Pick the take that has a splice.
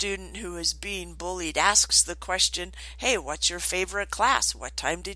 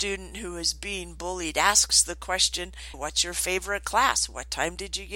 second; 1 cut; at 2.9 s

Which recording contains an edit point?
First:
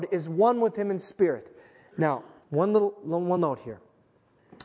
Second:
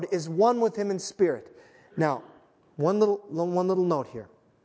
first; 2 cuts; at 2.4 s, 3.4 s

